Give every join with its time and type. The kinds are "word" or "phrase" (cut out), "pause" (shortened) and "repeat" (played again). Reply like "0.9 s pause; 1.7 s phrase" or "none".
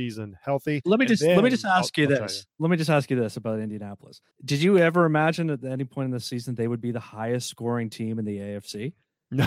2.5 s pause; 4.3 s pause